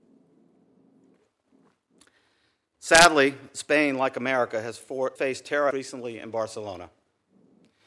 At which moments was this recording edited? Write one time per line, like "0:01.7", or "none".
0:05.2
0:05.7